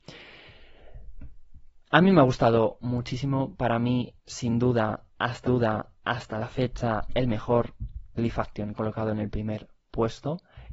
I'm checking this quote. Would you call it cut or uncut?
cut